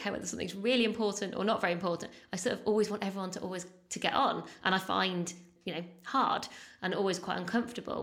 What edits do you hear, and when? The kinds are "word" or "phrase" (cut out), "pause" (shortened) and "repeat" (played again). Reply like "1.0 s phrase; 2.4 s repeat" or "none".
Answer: 5.6 s word